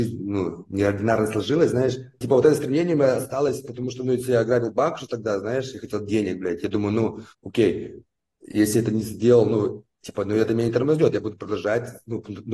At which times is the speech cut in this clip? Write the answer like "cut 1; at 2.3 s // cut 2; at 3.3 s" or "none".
cut 1; at 7.3 s